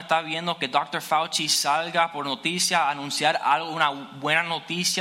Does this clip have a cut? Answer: no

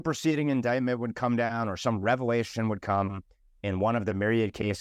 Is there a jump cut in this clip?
no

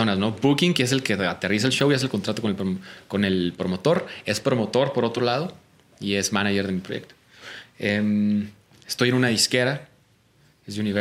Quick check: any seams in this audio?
no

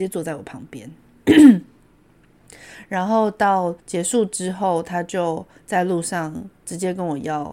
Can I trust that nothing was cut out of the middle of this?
no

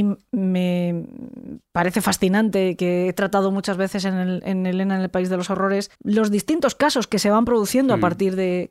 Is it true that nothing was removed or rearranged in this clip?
no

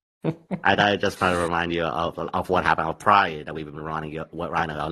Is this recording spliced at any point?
no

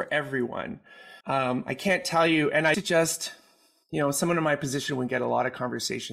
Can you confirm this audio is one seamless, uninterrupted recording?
no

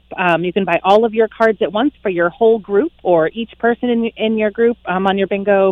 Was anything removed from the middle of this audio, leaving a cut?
no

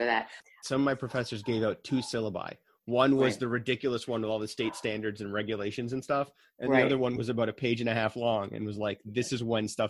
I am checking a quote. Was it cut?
no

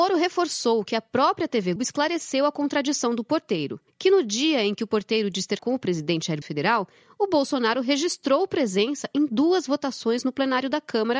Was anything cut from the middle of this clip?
yes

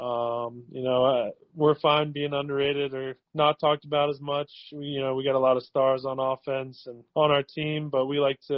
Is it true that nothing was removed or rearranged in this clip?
no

